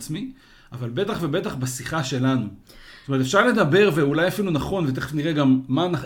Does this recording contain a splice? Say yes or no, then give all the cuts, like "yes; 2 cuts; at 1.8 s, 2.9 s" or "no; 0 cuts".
no; 0 cuts